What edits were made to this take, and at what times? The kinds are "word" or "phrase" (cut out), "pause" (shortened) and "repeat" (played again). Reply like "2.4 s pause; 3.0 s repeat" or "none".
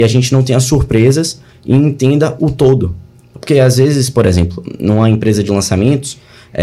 none